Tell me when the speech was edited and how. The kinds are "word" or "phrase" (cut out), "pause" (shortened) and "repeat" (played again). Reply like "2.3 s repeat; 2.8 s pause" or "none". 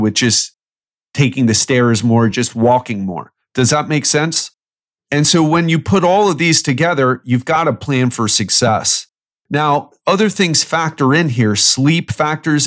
none